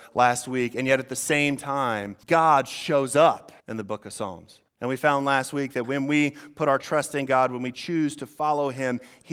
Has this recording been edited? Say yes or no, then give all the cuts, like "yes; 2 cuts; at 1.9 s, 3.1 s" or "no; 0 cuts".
yes; 3 cuts; at 2.2 s, 3.6 s, 4.7 s